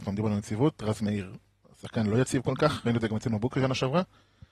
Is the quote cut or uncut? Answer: uncut